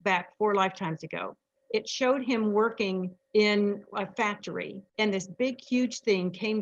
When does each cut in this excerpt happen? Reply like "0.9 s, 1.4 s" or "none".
1.6 s, 3.2 s